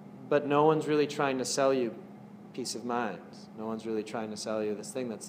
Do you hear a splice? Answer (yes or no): no